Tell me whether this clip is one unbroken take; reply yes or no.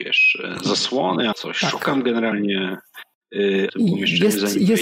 no